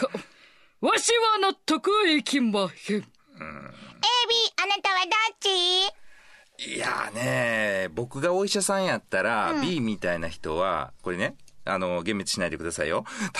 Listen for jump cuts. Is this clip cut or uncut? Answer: uncut